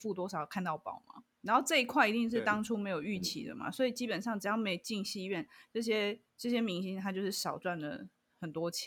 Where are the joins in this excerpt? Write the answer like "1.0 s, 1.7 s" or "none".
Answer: 1.3 s, 6.3 s